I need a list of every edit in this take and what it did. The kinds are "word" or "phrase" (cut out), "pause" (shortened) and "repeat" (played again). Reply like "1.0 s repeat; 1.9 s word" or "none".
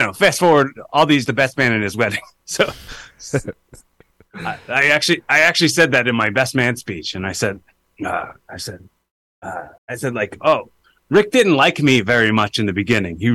1.3 s phrase; 2.4 s pause; 9.8 s pause